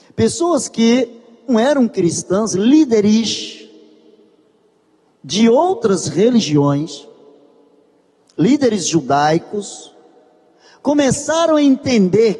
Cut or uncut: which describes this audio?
cut